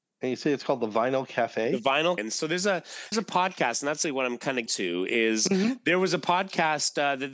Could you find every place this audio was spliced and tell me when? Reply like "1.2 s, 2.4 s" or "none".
2.2 s, 3.1 s, 4.0 s, 4.7 s